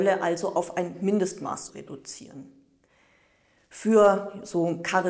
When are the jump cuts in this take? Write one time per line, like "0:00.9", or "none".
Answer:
0:01.7